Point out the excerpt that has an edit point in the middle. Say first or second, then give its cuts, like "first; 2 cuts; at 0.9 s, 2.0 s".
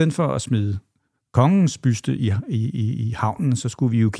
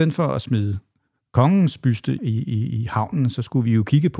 second; 1 cut; at 2.2 s